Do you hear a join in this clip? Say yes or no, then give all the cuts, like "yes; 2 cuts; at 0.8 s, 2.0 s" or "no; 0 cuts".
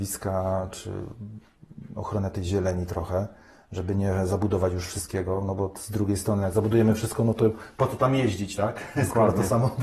no; 0 cuts